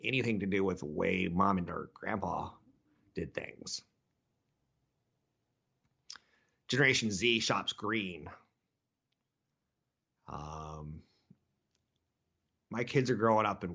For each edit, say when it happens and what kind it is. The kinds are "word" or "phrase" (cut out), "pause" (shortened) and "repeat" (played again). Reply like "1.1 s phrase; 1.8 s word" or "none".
1.7 s word